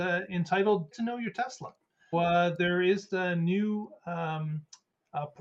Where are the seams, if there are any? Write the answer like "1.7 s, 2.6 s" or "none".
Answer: 0.9 s, 2.1 s, 3.1 s